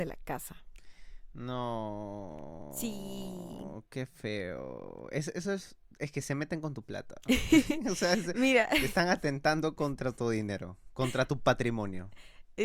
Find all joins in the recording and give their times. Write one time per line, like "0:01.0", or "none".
none